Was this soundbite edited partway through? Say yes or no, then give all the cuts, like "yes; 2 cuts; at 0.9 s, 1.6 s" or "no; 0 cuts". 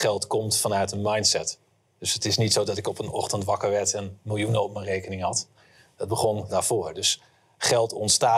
yes; 1 cut; at 6.5 s